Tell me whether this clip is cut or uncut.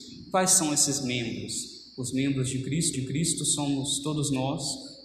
cut